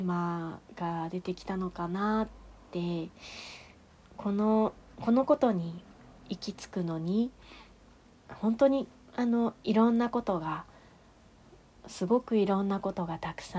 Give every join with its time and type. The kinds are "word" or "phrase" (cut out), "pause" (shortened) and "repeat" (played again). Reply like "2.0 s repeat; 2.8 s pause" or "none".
none